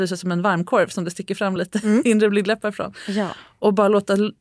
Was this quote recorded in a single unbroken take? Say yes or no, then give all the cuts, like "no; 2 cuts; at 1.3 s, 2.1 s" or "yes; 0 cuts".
yes; 0 cuts